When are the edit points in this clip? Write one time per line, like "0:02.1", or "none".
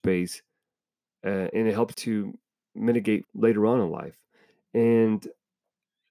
0:01.5
0:01.9
0:03.2